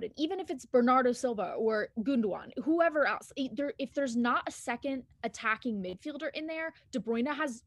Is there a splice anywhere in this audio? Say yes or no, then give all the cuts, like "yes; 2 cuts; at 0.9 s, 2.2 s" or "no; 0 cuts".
yes; 1 cut; at 5.1 s